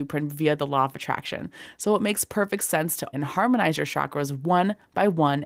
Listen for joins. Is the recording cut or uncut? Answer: cut